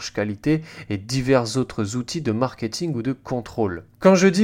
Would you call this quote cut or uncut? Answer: uncut